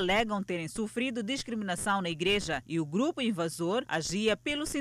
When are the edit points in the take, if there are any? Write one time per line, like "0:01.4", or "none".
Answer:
none